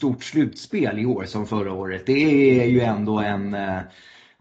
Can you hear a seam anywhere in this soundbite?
no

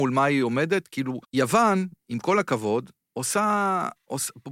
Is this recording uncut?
no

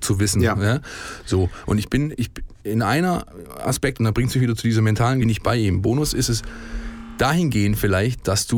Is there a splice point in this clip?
yes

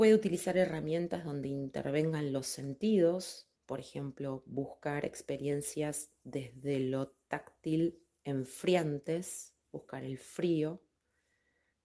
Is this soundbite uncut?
no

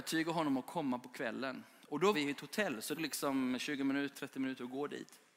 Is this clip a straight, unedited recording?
no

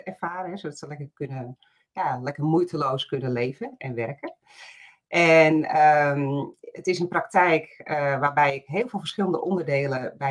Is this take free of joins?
yes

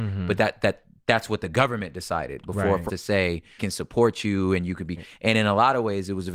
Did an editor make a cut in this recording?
yes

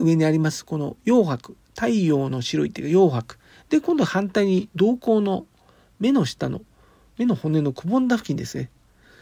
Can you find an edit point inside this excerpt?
no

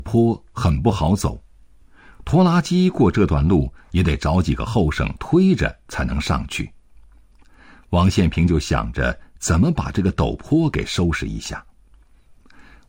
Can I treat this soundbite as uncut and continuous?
yes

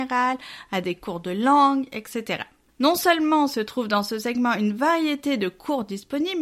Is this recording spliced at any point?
no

